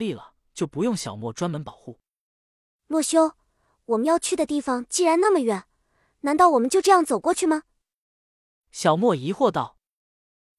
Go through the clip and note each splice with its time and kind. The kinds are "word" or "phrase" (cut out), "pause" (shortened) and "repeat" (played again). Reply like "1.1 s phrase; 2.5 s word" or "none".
none